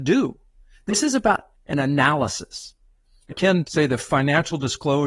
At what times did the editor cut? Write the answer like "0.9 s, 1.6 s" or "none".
1.5 s, 3.3 s, 3.6 s